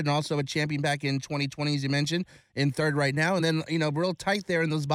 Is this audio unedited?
yes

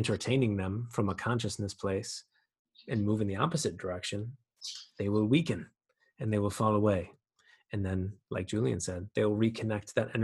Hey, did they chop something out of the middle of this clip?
no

